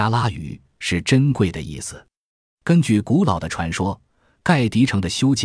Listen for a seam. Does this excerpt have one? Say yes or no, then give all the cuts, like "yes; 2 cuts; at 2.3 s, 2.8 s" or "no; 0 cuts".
no; 0 cuts